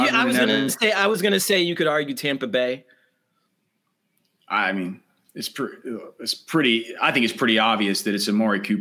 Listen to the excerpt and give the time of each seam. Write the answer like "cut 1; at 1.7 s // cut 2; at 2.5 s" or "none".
none